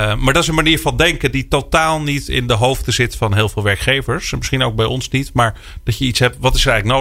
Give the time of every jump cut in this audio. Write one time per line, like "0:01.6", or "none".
none

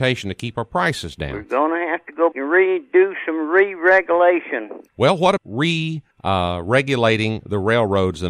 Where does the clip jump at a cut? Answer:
0:02.3
0:04.9
0:05.4
0:06.1

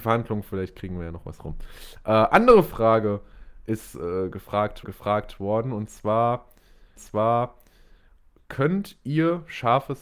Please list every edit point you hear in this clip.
0:04.8
0:07.0

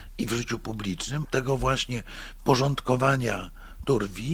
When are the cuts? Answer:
0:01.2

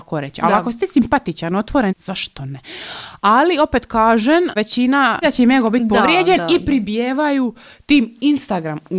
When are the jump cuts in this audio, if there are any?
0:01.9
0:05.2

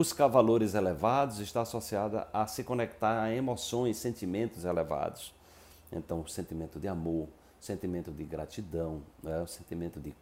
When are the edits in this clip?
none

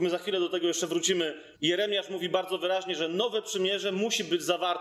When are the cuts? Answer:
0:01.5

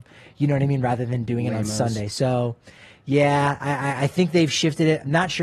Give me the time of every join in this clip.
none

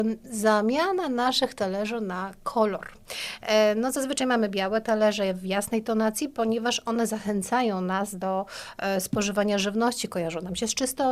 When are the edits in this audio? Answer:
none

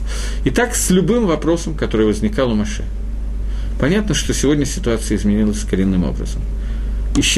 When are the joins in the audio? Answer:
none

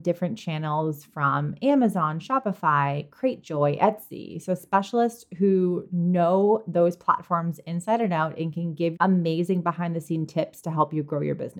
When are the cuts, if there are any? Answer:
0:08.9

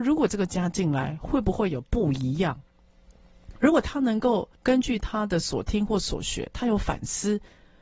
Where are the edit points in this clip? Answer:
0:04.5

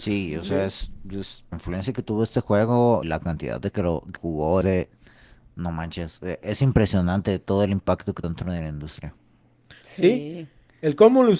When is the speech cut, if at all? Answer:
0:01.5
0:03.0
0:03.7
0:04.2
0:04.6
0:06.2
0:08.2

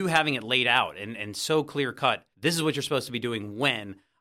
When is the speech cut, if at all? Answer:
0:02.3

